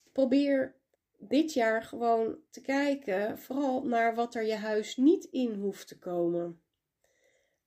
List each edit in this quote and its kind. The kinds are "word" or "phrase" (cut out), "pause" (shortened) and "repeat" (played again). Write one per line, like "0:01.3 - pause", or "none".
0:00.9 - pause
0:02.5 - pause